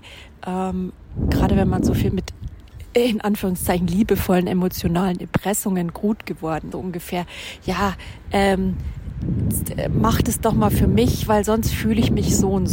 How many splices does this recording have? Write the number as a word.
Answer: two